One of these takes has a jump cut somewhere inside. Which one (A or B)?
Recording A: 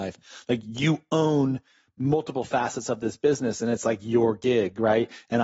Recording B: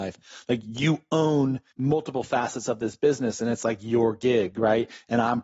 B